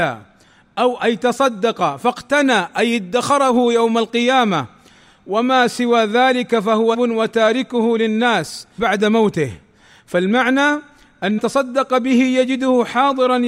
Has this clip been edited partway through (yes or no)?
yes